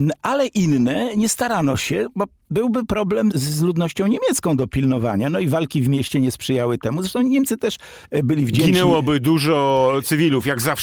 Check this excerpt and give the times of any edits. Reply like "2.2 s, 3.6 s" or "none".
3.3 s